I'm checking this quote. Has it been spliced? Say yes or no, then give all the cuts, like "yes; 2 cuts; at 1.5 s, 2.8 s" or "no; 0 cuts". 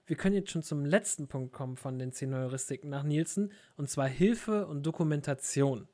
no; 0 cuts